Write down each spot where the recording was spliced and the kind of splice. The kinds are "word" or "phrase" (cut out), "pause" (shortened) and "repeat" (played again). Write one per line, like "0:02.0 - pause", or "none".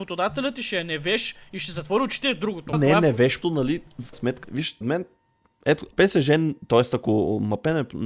0:02.7 - word
0:03.4 - word
0:04.1 - word
0:04.4 - word
0:04.8 - word
0:05.9 - word